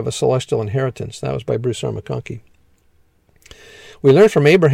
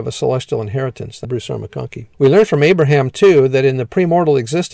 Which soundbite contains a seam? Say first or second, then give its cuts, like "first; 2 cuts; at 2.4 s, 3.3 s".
second; 2 cuts; at 1.2 s, 2.1 s